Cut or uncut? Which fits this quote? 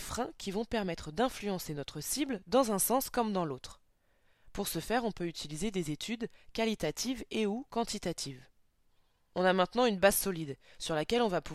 uncut